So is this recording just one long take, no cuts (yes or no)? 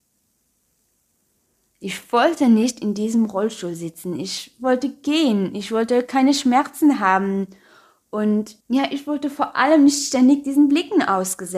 no